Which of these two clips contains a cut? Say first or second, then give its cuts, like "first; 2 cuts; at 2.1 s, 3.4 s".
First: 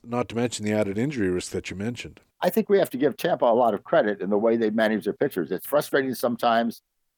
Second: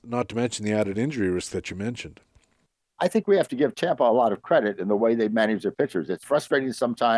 first; 1 cut; at 2.3 s